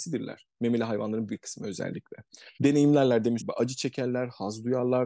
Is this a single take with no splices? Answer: no; 3 cuts; at 1.3 s, 2.5 s, 3.4 s

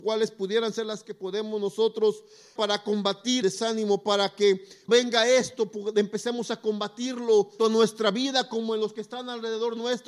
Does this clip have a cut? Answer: yes; 5 cuts; at 1.0 s, 2.6 s, 3.4 s, 4.9 s, 7.6 s

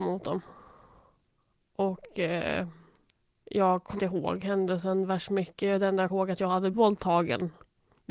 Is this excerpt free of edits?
no; 4 cuts; at 3.2 s, 4.0 s, 6.1 s, 6.7 s

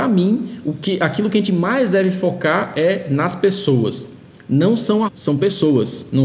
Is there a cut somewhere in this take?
yes; 1 cut; at 5.1 s

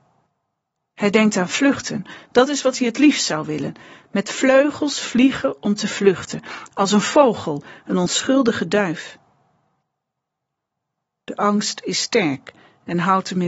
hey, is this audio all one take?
yes; 0 cuts

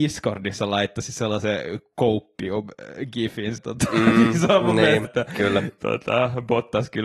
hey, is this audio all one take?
no; 2 cuts; at 3.6 s, 5.0 s

